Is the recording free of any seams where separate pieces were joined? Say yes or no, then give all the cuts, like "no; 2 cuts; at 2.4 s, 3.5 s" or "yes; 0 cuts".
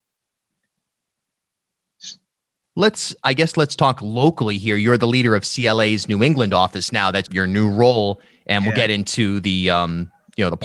no; 1 cut; at 7.3 s